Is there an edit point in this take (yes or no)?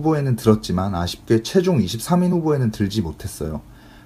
no